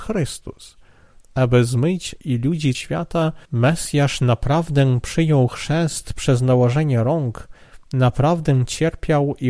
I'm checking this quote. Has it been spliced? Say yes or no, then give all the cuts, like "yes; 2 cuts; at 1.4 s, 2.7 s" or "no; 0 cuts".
yes; 3 cuts; at 2.2 s, 2.7 s, 3.4 s